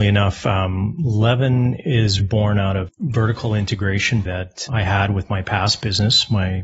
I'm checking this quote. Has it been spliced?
yes; 4 cuts; at 2.2 s, 2.9 s, 4.3 s, 4.7 s

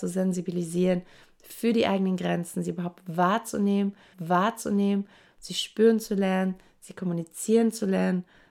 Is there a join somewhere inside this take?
yes; 1 cut; at 4.1 s

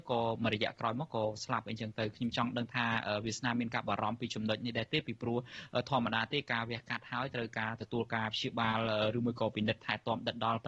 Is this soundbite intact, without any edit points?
yes; 0 cuts

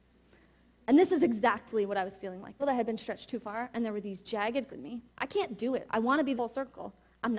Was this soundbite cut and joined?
yes; 4 cuts; at 2.6 s, 4.7 s, 5.1 s, 6.4 s

